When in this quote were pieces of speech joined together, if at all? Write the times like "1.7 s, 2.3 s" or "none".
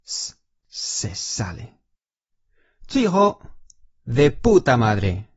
2.3 s